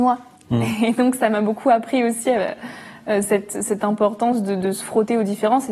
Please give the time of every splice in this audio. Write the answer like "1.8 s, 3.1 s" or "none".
none